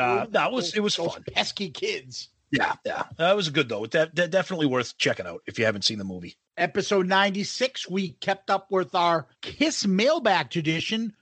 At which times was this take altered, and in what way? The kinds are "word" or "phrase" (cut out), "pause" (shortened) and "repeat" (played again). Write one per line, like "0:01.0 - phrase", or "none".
0:02.8 - pause
0:06.4 - pause
0:09.3 - pause